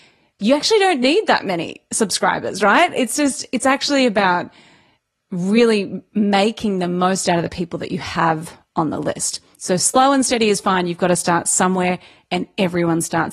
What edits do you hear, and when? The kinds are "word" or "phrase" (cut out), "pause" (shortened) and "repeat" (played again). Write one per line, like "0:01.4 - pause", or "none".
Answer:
none